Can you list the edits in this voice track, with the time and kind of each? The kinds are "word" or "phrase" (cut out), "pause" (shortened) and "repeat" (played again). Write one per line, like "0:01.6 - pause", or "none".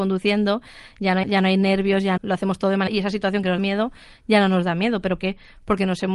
0:01.2 - word
0:02.2 - word
0:02.9 - word
0:03.6 - word
0:05.2 - word

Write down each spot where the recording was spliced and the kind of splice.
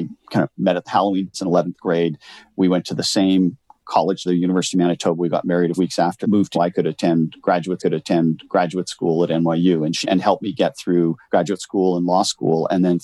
0:01.3 - word
0:04.3 - word
0:05.8 - word
0:06.2 - word
0:06.5 - phrase
0:07.8 - repeat
0:10.0 - word
0:11.2 - pause

